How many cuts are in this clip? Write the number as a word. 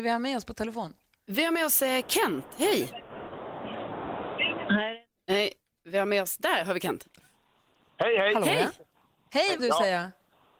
one